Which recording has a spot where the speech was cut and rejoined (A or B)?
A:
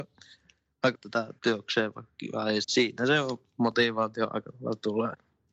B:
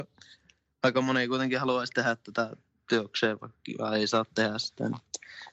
A